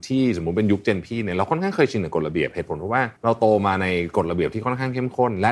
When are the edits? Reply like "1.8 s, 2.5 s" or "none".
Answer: 3.2 s

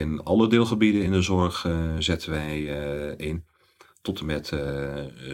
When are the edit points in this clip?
none

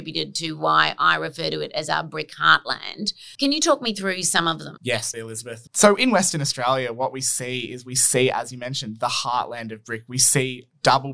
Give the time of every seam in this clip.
5.1 s

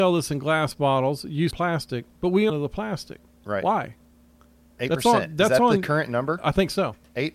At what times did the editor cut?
1.5 s, 2.1 s, 2.5 s

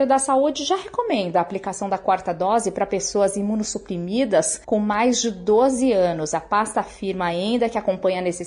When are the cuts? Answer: 4.6 s

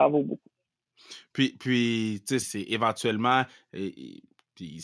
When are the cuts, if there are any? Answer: 2.4 s

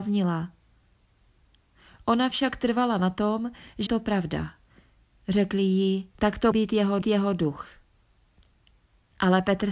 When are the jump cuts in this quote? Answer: 3.9 s, 6.2 s, 6.5 s, 7.0 s

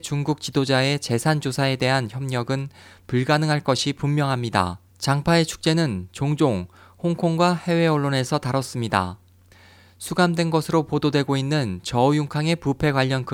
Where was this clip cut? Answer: 4.9 s

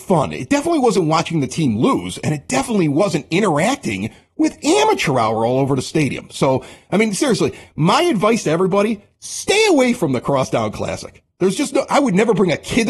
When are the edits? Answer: none

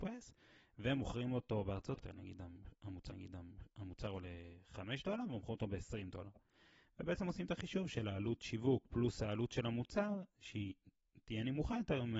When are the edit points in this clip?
2.0 s, 3.1 s

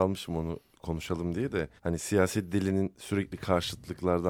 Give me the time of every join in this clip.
1.8 s

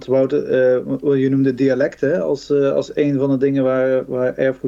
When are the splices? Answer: none

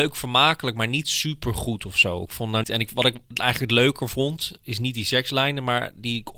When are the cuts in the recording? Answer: 2.6 s

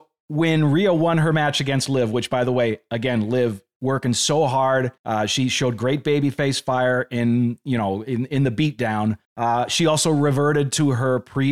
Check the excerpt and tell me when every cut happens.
5.0 s, 9.2 s

